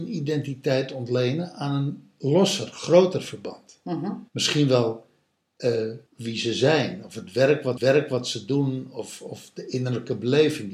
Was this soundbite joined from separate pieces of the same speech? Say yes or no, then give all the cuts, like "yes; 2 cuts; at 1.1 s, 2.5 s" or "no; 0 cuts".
yes; 3 cuts; at 4.3 s, 6.1 s, 7.8 s